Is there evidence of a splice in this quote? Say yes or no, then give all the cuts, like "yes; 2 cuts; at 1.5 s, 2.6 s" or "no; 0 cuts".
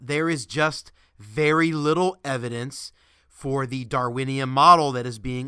no; 0 cuts